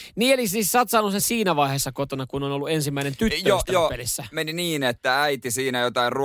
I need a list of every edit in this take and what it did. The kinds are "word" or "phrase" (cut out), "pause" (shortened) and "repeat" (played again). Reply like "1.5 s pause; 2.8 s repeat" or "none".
1.2 s word